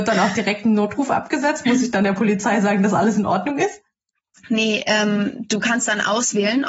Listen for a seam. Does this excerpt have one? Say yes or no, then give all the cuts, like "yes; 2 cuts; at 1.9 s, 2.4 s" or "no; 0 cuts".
no; 0 cuts